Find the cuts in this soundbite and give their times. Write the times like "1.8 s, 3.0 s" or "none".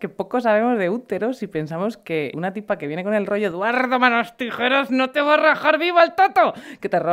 2.3 s

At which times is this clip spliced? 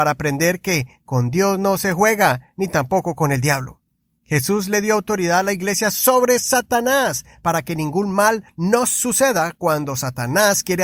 none

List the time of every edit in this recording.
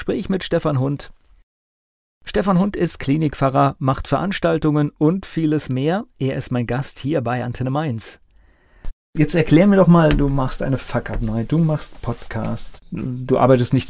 none

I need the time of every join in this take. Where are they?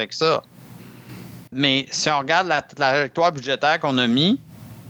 1.5 s

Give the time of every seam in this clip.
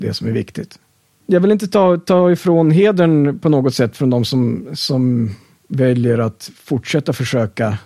none

